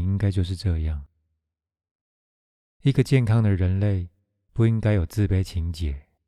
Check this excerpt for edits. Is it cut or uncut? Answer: uncut